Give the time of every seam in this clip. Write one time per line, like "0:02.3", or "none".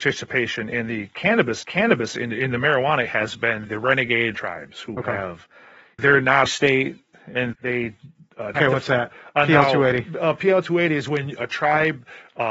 0:01.6
0:03.0
0:03.7
0:04.3
0:06.0
0:06.5
0:07.5
0:08.5